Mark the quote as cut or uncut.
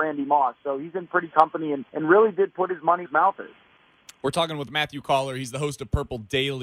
cut